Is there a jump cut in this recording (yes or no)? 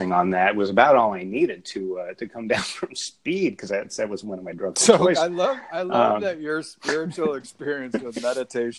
no